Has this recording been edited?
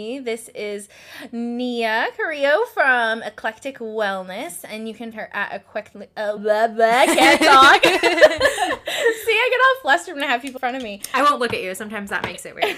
yes; 3 cuts; at 5.1 s, 6.4 s, 10.6 s

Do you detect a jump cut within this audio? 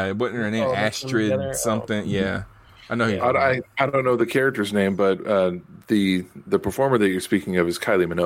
no; 0 cuts

